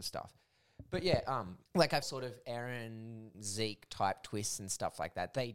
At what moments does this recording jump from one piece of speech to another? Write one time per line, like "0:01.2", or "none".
0:01.7
0:02.0
0:03.3